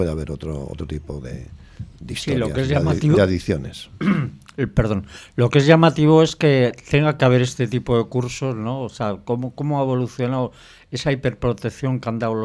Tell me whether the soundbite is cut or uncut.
uncut